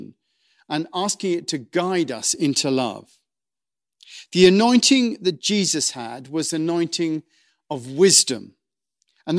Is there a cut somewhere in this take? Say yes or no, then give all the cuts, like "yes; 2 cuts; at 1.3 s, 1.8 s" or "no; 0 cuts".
no; 0 cuts